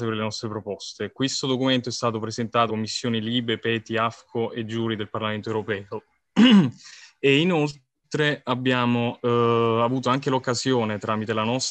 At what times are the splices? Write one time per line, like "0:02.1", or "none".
0:02.7